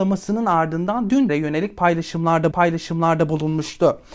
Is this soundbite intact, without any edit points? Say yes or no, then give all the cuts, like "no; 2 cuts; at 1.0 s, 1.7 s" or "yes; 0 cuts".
no; 2 cuts; at 1.3 s, 2.5 s